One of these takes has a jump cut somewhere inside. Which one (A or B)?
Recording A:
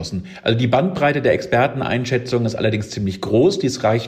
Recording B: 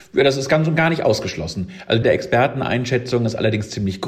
B